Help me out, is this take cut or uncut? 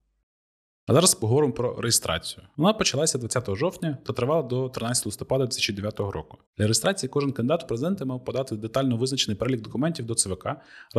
cut